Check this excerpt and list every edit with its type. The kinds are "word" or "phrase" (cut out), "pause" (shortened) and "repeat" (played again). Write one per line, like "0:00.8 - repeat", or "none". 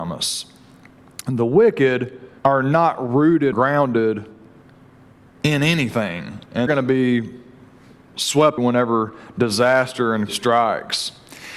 0:02.4 - pause
0:03.5 - word
0:06.7 - word
0:08.6 - word
0:10.3 - word